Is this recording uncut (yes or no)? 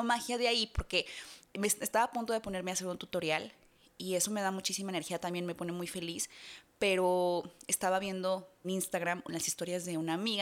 no